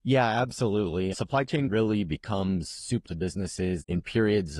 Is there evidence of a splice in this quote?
yes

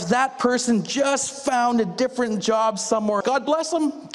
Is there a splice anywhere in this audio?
yes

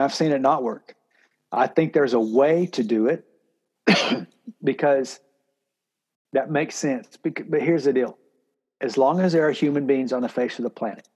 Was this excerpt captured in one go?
yes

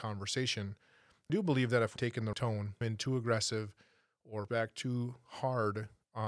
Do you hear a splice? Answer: yes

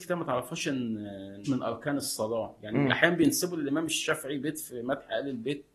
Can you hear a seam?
yes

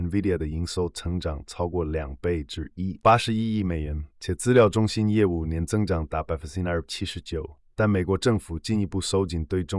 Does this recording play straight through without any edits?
no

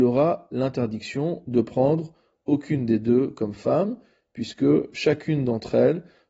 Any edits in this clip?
no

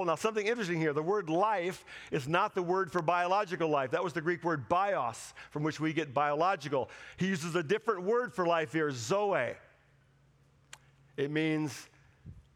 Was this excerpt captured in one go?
yes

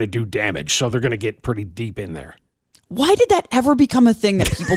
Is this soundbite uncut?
yes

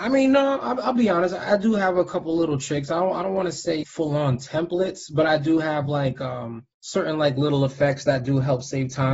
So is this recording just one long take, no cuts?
no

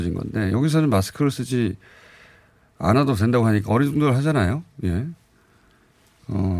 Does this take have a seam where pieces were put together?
no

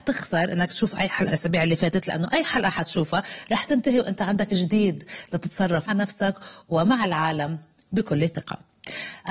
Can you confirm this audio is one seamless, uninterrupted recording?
no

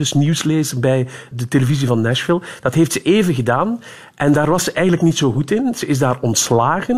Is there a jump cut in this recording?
yes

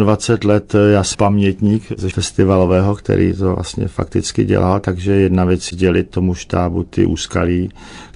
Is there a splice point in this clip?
yes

